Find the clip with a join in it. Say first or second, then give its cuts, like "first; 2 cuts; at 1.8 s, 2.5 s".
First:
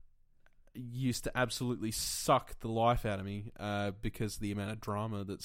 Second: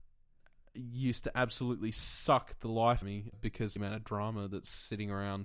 second; 3 cuts; at 3.0 s, 3.3 s, 3.8 s